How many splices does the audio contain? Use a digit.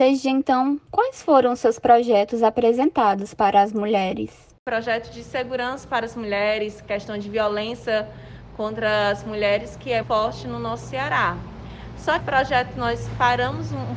2